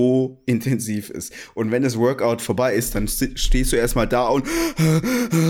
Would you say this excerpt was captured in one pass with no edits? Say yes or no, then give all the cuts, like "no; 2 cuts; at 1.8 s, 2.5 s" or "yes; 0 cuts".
yes; 0 cuts